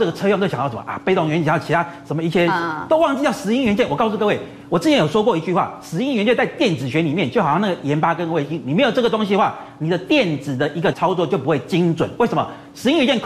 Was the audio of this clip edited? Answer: yes; 1 cut; at 10.9 s

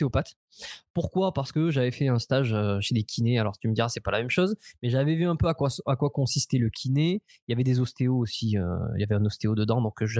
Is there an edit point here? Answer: no; 0 cuts

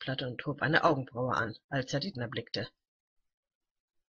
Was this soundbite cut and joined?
yes; 2 cuts; at 1.6 s, 2.1 s

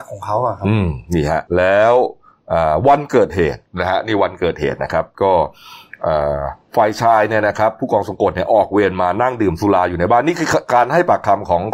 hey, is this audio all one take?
no; 1 cut; at 1.5 s

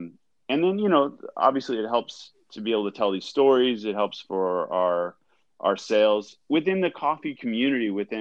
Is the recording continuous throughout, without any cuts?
yes; 0 cuts

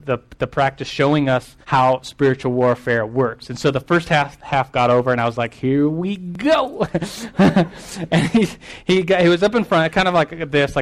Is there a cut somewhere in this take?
yes; 1 cut; at 1.6 s

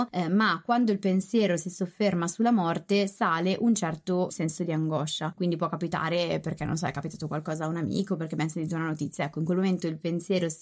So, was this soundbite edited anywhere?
no; 0 cuts

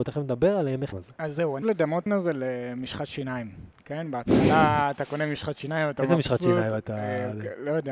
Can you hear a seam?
yes; 3 cuts; at 0.9 s, 1.6 s, 2.1 s

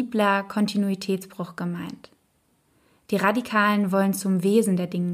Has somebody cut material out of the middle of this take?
no; 0 cuts

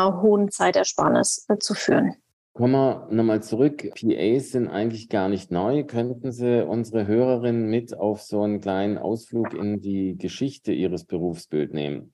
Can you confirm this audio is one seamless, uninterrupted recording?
yes; 0 cuts

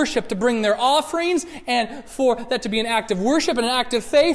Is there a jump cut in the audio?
no; 0 cuts

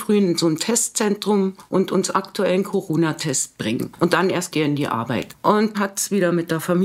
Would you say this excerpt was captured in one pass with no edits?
no; 3 cuts; at 2.1 s, 4.5 s, 5.7 s

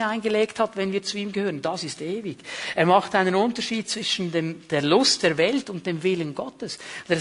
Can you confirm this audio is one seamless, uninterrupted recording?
yes; 0 cuts

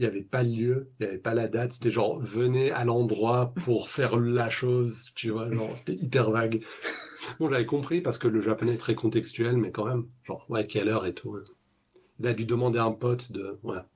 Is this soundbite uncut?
yes; 0 cuts

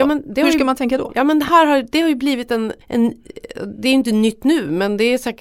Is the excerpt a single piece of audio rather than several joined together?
no; 1 cut; at 2.8 s

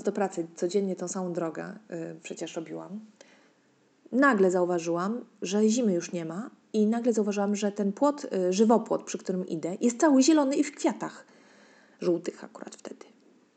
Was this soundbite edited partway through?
no; 0 cuts

